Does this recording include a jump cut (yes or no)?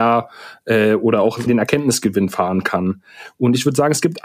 yes